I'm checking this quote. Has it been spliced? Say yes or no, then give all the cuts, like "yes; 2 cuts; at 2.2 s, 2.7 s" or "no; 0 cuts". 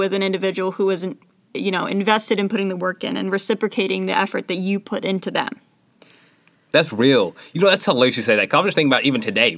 no; 0 cuts